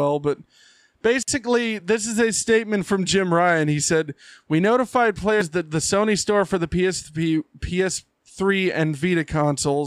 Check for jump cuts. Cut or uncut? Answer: uncut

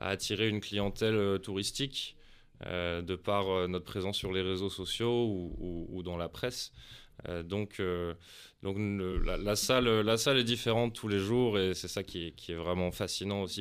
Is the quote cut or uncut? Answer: uncut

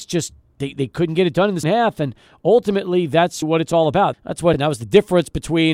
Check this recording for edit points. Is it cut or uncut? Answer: cut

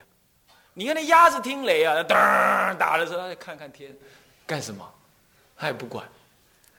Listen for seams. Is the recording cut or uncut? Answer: uncut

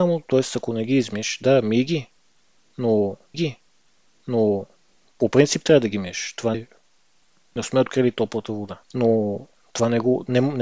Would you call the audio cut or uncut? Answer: cut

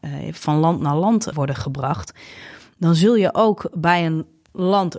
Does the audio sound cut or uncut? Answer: cut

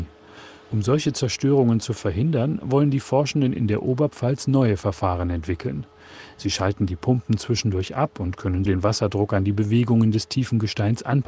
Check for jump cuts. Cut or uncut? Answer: cut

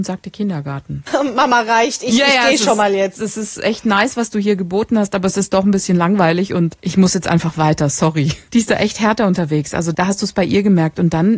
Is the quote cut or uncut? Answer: cut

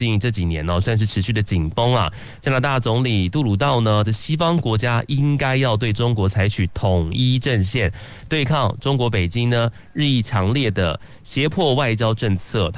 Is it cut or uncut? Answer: cut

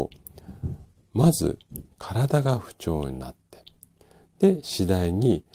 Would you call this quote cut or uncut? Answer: uncut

